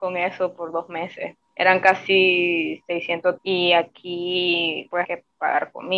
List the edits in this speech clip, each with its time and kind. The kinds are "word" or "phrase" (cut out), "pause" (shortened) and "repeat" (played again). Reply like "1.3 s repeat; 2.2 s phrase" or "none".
3.4 s word; 5.0 s word